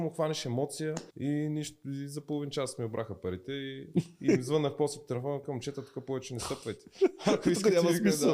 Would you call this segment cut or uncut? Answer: cut